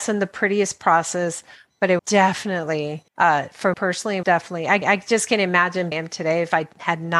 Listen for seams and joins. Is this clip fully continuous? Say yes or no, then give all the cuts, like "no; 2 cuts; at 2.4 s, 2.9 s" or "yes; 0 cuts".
no; 6 cuts; at 2.0 s, 3.1 s, 3.7 s, 4.2 s, 4.8 s, 5.9 s